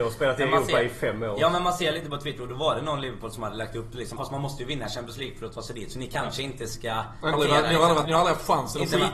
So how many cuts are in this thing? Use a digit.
3